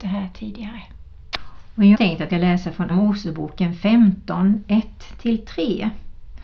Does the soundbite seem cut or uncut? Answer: cut